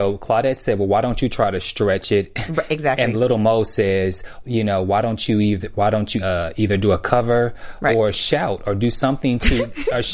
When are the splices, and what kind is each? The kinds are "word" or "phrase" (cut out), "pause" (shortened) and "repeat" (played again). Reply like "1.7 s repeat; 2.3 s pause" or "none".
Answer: 3.1 s word; 4.4 s word; 6.2 s word